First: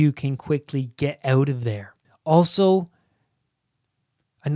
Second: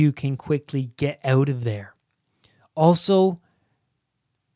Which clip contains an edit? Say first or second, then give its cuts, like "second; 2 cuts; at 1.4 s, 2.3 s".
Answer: first; 1 cut; at 2.0 s